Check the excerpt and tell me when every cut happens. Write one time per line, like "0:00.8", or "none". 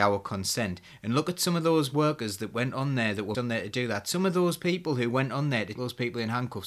0:03.3
0:05.8